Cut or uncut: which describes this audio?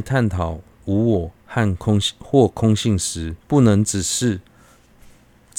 cut